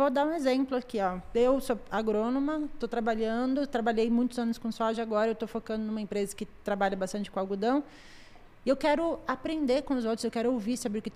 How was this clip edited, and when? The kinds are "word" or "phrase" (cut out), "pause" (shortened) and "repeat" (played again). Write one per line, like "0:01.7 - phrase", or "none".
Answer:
none